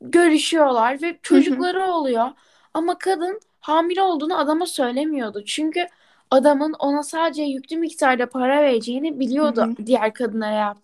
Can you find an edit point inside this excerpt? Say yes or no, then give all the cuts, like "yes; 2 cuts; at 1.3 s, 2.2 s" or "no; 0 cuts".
no; 0 cuts